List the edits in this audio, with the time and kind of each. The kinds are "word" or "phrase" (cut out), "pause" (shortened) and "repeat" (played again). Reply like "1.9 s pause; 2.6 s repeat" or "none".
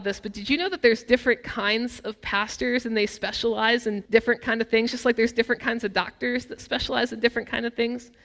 4.1 s pause